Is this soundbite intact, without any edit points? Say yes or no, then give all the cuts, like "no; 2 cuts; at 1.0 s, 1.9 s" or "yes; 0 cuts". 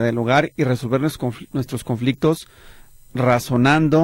yes; 0 cuts